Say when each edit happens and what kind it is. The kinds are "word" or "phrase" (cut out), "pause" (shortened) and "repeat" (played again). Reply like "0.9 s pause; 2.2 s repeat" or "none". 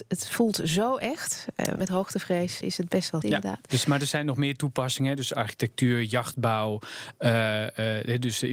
1.8 s phrase; 2.6 s word; 3.2 s word

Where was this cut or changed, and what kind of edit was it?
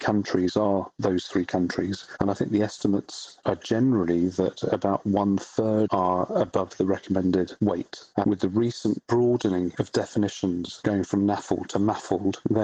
5.9 s phrase; 8.2 s phrase

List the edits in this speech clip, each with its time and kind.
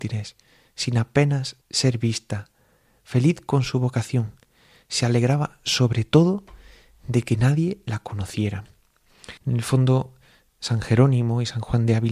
1.6 s pause; 9.4 s pause

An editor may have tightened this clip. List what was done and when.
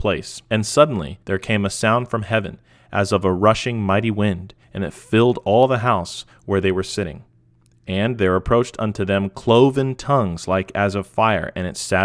1.2 s pause; 4.6 s pause

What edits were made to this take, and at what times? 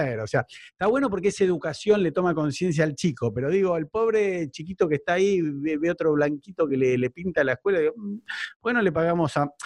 none

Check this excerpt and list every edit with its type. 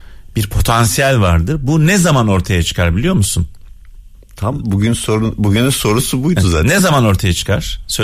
none

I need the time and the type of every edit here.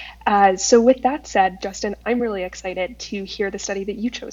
none

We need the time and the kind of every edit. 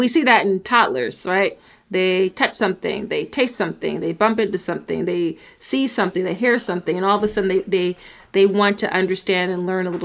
none

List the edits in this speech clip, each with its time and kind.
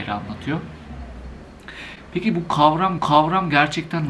3.0 s repeat

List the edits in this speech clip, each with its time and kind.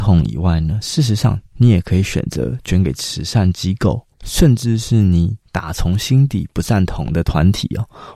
1.5 s pause; 4.1 s pause; 5.4 s pause

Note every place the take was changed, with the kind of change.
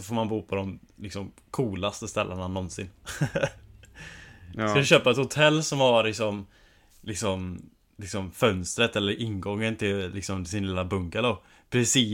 none

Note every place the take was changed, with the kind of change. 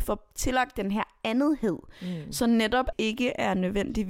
2.9 s phrase

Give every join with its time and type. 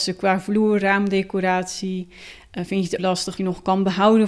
3.0 s word; 3.4 s word

